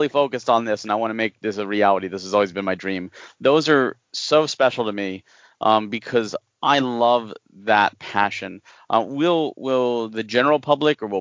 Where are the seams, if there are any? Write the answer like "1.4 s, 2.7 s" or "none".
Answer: none